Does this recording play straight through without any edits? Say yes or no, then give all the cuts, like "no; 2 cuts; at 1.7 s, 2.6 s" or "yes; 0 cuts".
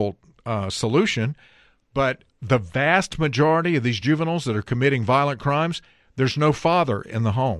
yes; 0 cuts